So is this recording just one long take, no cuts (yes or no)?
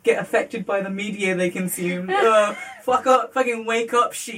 yes